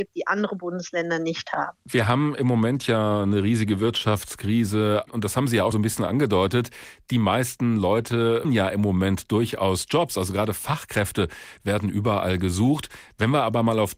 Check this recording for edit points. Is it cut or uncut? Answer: cut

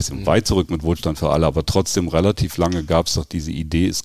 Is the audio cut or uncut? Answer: uncut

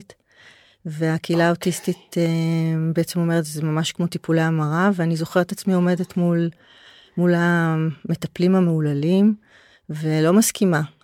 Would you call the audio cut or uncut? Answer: uncut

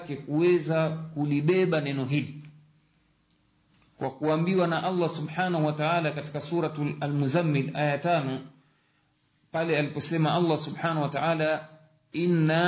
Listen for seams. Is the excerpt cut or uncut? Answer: uncut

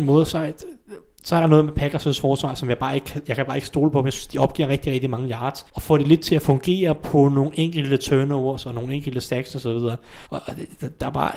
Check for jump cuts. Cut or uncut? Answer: cut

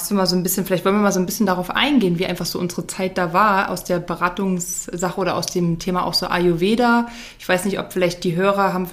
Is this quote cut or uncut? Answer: uncut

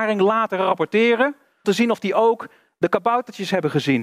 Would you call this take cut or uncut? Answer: cut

